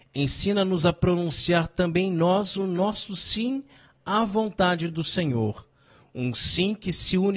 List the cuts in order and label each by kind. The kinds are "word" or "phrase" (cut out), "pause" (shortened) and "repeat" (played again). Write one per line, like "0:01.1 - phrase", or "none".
none